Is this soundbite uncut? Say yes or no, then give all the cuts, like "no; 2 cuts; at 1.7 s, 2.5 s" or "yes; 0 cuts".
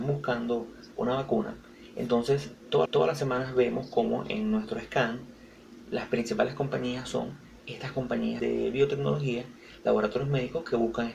no; 2 cuts; at 2.9 s, 8.4 s